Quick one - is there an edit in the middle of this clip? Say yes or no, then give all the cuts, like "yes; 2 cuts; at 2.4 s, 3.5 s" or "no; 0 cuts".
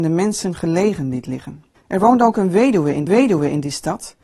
yes; 2 cuts; at 1.8 s, 3.1 s